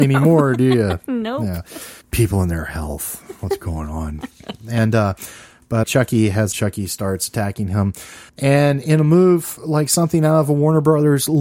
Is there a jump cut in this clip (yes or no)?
yes